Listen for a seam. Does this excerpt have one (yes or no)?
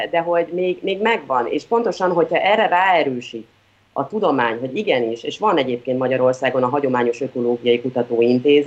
no